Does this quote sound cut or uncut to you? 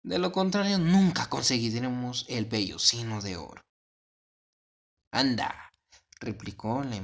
uncut